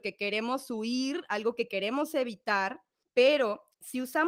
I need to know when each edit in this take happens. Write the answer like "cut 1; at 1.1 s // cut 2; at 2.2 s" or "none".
cut 1; at 3.0 s